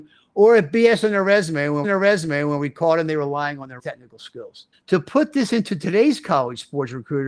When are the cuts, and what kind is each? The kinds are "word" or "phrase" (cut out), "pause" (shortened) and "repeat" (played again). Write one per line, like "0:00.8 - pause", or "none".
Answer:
0:01.8 - repeat
0:03.8 - phrase
0:04.7 - pause

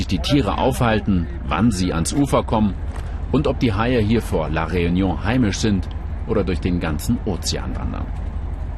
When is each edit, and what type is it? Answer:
none

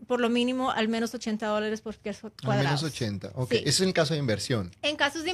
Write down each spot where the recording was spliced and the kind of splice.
none

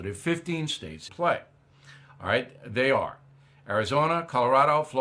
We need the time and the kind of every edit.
0:01.1 - word

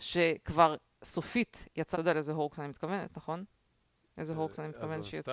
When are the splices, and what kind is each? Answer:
0:01.9 - word

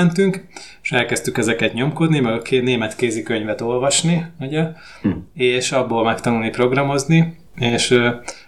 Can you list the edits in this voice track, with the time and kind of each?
0:07.5 - pause

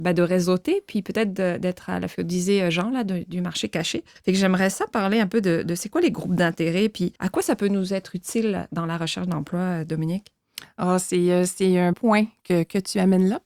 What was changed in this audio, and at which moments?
0:02.1 - phrase
0:04.2 - pause
0:07.2 - pause
0:11.9 - word

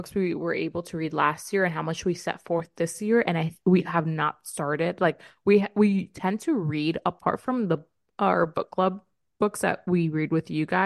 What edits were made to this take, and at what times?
none

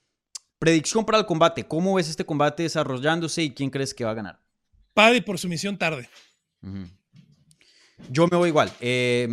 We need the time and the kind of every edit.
none

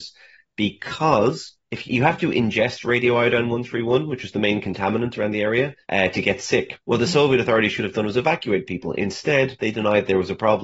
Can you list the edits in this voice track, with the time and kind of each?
0:01.8 - word
0:05.8 - pause
0:06.8 - pause

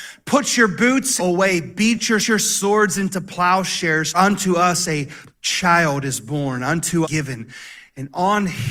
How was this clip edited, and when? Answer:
0:01.2 - phrase
0:02.2 - repeat
0:04.1 - word
0:05.3 - pause
0:07.0 - phrase

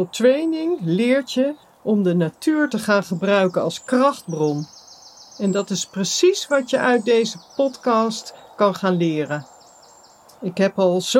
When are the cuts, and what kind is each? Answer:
none

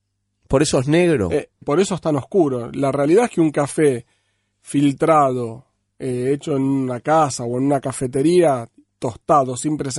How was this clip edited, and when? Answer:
0:01.6 - word

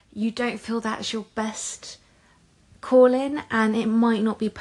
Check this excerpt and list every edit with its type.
none

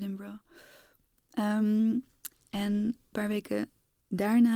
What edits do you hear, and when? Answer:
0:03.1 - word

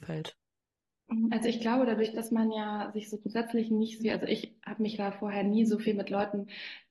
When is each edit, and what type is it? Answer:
0:04.0 - word

